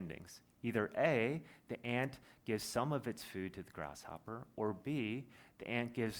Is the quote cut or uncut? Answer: uncut